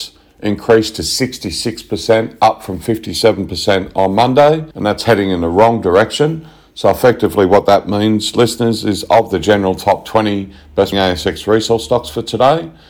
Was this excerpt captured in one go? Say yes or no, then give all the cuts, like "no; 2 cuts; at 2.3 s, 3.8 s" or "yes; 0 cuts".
no; 2 cuts; at 4.7 s, 10.9 s